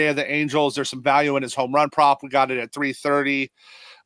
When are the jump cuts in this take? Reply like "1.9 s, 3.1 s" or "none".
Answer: none